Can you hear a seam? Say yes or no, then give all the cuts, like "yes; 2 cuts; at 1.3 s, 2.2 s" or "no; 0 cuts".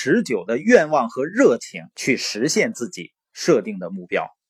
yes; 1 cut; at 1.9 s